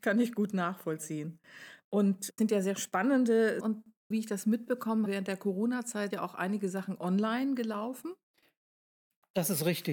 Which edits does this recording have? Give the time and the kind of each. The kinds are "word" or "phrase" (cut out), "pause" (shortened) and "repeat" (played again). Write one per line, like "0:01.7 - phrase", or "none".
0:02.4 - word
0:03.6 - word
0:04.1 - word
0:05.1 - word
0:06.1 - word